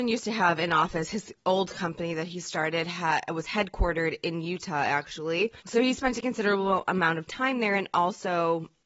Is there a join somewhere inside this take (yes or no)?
yes